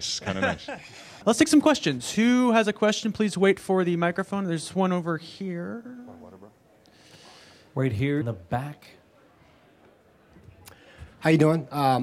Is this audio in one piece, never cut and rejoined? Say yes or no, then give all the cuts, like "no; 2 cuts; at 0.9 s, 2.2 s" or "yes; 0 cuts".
no; 1 cut; at 8.2 s